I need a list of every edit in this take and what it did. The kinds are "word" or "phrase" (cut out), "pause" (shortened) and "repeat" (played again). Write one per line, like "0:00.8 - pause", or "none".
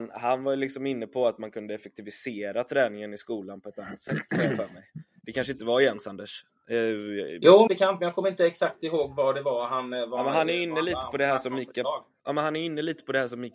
0:07.7 - phrase